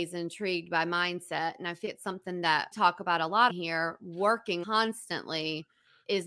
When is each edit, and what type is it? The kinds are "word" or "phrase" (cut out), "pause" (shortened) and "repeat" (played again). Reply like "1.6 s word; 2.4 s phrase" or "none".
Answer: 1.9 s word; 2.7 s word; 3.5 s word; 4.6 s word